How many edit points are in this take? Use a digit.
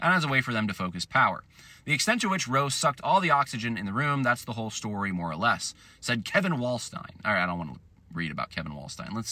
0